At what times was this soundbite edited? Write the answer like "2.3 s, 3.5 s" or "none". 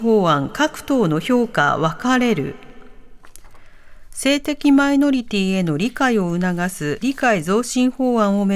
7.0 s